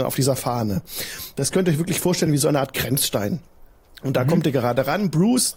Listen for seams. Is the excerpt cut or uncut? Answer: uncut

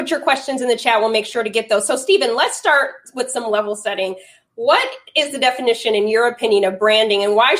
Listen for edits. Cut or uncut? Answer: uncut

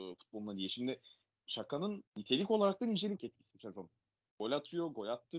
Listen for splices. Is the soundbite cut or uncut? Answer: cut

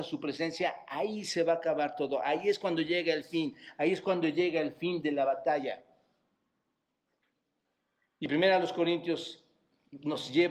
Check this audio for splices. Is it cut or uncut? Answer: uncut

